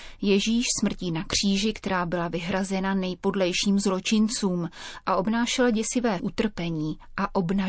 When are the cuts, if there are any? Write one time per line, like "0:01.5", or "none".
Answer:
0:06.2